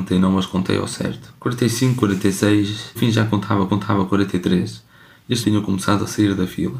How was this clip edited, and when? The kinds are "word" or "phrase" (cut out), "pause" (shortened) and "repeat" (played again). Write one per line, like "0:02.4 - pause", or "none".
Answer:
0:01.4 - pause
0:03.0 - word
0:03.7 - repeat
0:05.4 - phrase